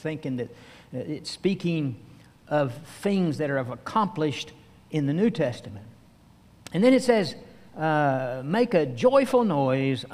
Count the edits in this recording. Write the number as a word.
zero